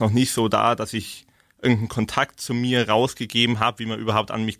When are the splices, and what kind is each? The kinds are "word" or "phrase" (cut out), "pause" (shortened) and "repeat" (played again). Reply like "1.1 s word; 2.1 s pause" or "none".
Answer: none